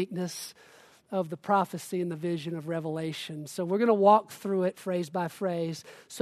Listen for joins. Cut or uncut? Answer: uncut